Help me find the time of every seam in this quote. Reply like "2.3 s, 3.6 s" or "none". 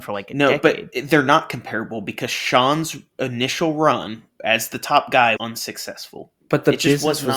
5.4 s, 6.4 s